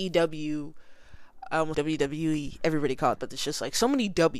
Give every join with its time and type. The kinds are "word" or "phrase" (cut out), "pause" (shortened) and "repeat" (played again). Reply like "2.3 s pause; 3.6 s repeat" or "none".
1.7 s word; 3.2 s word